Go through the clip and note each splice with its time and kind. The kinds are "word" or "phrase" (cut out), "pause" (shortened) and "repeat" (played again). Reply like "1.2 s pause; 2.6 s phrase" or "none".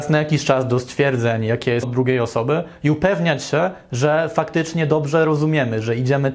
1.8 s word